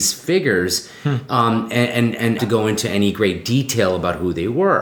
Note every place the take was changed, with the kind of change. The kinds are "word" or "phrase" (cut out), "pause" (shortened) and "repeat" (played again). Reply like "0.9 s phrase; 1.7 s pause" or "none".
2.4 s phrase